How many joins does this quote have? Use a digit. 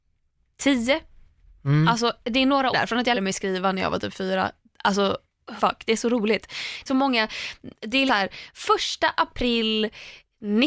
5